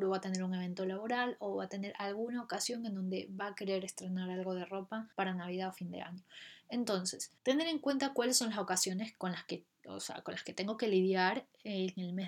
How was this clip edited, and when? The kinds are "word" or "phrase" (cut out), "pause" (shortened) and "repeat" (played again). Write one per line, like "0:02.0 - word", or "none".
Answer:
0:05.1 - pause
0:07.4 - pause